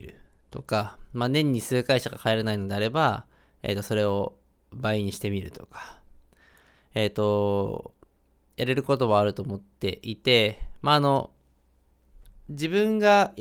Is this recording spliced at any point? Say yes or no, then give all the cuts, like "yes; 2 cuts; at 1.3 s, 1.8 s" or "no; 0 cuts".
no; 0 cuts